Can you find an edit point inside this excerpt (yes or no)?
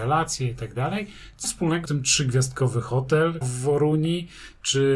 yes